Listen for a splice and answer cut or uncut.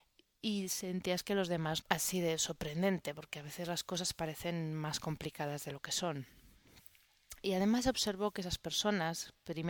cut